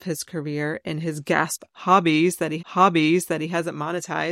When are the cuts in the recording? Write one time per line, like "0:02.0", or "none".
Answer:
0:02.6

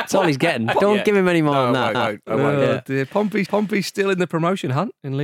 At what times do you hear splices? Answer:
0:01.9
0:03.5

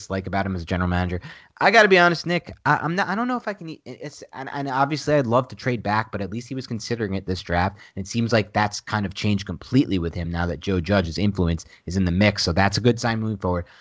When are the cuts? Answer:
none

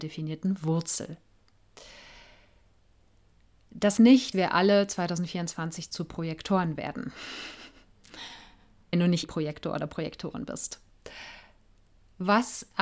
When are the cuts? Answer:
0:04.0
0:04.3
0:08.9
0:09.2

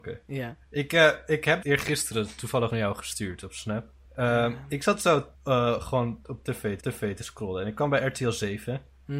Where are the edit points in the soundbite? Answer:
0:01.6
0:02.7
0:04.1
0:05.3
0:06.8

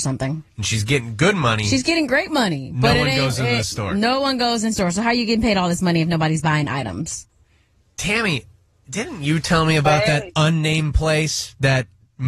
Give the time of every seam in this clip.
0:04.7

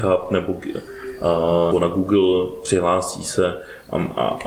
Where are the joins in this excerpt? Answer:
0:01.7

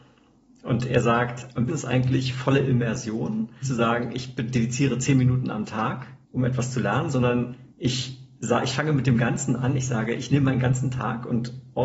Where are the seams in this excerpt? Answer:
0:01.7
0:03.6
0:06.2
0:07.7

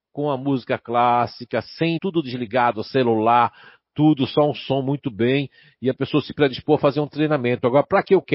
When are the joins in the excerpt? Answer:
0:02.0

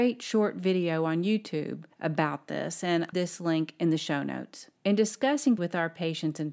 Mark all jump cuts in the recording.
0:01.9
0:03.1
0:04.8
0:05.6

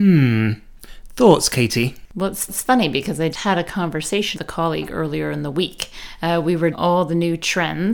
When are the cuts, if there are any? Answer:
0:02.5
0:03.3
0:04.3
0:06.7

